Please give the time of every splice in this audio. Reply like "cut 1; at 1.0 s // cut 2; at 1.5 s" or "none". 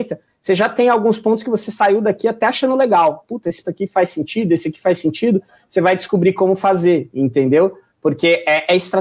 cut 1; at 3.6 s